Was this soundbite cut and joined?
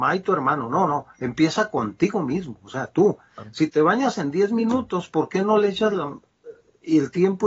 no; 0 cuts

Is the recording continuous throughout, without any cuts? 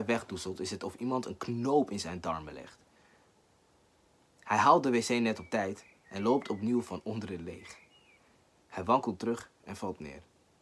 yes; 0 cuts

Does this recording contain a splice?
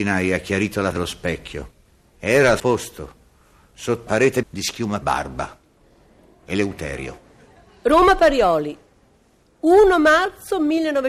yes; 5 cuts; at 0.9 s, 2.6 s, 4.1 s, 4.4 s, 5.0 s

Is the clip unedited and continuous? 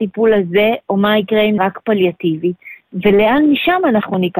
no; 1 cut; at 1.6 s

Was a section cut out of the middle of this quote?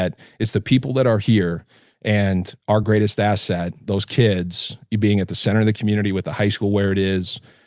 no; 0 cuts

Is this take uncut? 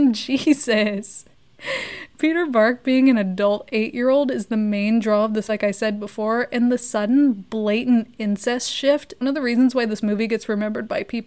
no; 2 cuts; at 5.5 s, 9.2 s

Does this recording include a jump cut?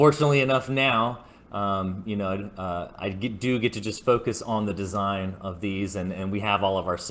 no; 0 cuts

